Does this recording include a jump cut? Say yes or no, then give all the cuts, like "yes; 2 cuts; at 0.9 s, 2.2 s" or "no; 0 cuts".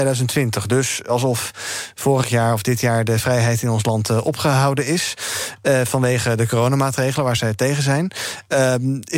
no; 0 cuts